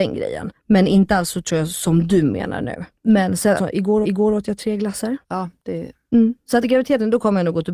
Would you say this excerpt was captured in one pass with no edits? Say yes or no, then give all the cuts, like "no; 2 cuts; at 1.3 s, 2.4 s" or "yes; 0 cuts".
no; 4 cuts; at 3.6 s, 4.0 s, 5.2 s, 6.6 s